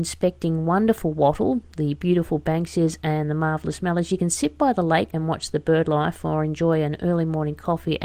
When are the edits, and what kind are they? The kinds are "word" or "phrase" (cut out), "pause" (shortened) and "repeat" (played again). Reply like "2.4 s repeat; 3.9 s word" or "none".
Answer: 5.1 s word